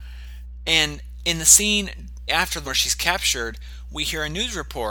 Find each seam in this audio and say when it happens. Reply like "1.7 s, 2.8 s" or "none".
2.3 s, 2.6 s